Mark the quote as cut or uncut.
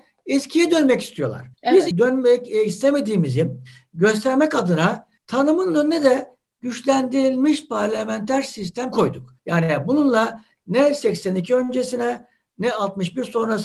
cut